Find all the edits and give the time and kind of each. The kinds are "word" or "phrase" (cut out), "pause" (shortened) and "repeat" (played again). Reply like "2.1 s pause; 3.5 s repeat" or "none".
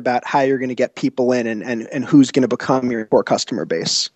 none